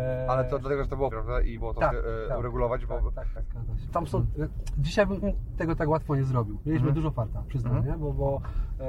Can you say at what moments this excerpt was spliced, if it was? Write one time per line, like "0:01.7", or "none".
0:01.1
0:01.6
0:01.9
0:03.4
0:03.9
0:05.2